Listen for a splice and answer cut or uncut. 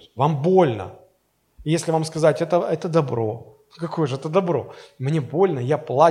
uncut